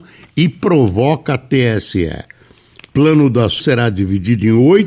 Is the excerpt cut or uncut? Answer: cut